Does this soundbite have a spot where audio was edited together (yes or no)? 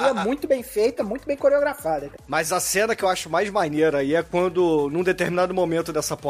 no